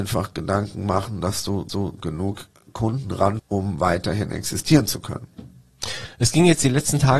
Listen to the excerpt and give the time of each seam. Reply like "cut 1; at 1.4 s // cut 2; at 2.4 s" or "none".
cut 1; at 1.7 s // cut 2; at 3.4 s